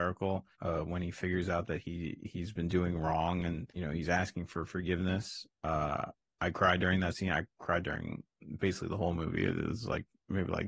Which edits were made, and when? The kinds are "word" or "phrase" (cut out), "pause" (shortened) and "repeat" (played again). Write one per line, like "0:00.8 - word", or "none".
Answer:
none